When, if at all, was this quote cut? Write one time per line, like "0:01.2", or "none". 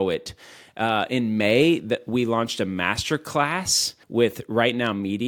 0:04.0